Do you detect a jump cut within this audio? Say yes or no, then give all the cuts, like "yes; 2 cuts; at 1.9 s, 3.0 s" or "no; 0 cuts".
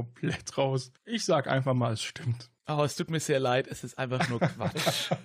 yes; 2 cuts; at 1.0 s, 2.6 s